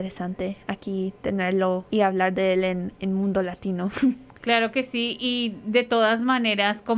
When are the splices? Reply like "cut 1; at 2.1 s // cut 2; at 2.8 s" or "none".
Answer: cut 1; at 1.9 s